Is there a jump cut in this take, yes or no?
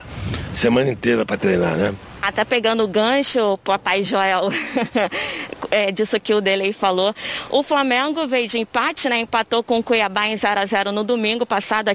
no